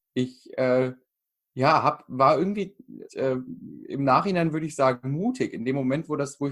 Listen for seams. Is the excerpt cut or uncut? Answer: cut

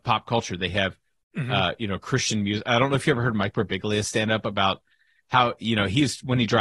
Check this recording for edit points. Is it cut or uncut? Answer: uncut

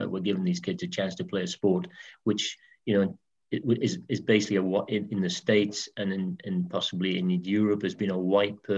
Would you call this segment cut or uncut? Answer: uncut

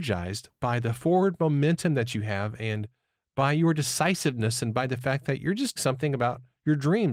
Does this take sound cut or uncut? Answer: cut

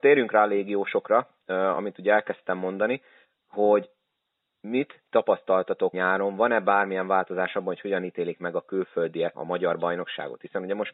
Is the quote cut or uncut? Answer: cut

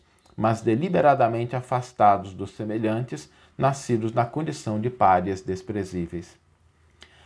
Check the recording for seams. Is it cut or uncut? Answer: uncut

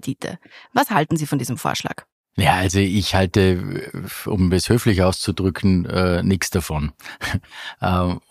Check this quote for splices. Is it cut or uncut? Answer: uncut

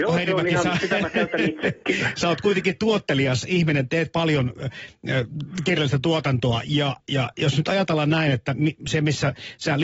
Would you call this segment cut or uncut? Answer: uncut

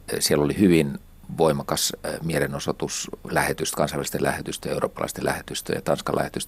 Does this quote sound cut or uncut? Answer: uncut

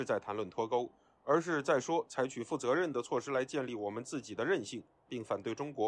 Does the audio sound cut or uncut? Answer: uncut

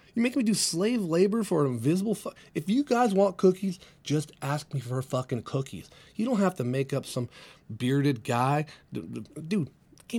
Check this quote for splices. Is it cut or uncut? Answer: uncut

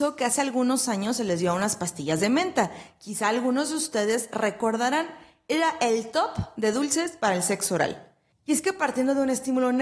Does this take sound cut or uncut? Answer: uncut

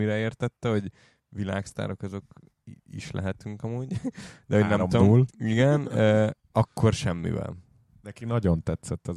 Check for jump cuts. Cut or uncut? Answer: uncut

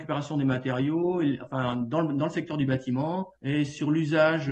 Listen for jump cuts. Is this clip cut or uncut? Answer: cut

